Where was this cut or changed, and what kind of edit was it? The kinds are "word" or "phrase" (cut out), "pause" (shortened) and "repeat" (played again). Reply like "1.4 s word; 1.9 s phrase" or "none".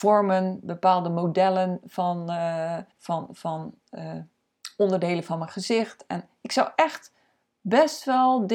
2.9 s pause